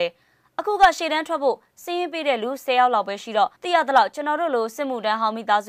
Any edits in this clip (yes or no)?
yes